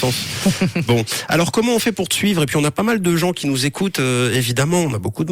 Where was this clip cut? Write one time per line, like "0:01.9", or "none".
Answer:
none